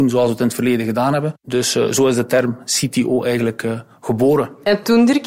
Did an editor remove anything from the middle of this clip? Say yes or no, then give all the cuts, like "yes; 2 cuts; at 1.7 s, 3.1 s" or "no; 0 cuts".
yes; 1 cut; at 1.4 s